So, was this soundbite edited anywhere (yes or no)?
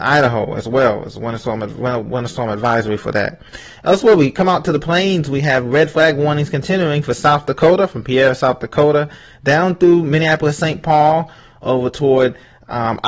no